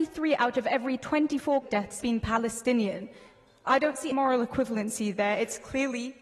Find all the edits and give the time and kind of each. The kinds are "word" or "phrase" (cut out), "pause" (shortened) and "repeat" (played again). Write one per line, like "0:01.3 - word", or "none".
0:01.6 - word
0:02.0 - word
0:04.1 - word